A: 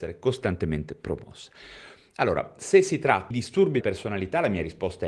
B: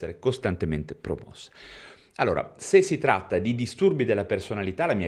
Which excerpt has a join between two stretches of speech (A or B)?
A